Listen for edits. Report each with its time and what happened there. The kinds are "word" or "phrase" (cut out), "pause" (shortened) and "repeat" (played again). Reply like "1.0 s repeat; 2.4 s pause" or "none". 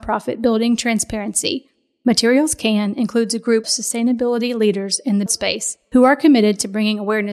3.6 s word; 5.3 s word